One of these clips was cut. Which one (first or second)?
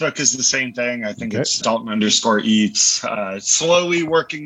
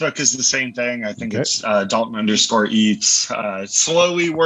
first